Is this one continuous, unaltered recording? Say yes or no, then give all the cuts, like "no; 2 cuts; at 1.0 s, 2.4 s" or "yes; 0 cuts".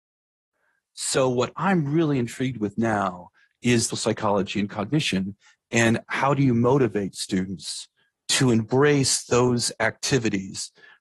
no; 1 cut; at 3.9 s